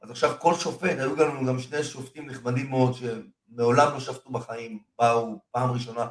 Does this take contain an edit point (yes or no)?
no